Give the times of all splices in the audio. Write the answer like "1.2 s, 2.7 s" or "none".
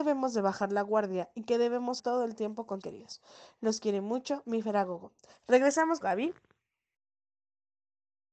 2.0 s, 2.8 s, 6.0 s